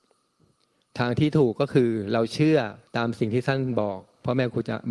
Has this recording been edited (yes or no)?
yes